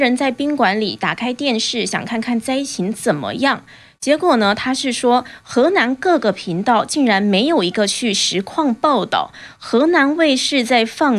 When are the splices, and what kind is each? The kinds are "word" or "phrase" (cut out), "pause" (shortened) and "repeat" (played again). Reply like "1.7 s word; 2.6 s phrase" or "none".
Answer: none